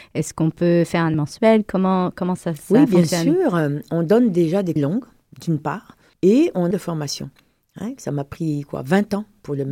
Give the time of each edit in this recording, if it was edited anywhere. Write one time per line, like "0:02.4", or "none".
0:01.1
0:04.8
0:06.1
0:06.7